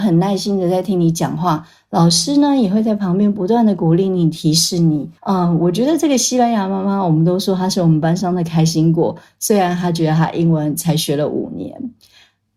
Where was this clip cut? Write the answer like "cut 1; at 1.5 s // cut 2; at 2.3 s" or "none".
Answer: cut 1; at 5.2 s